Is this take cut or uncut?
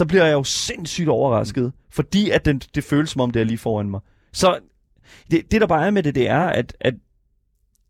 uncut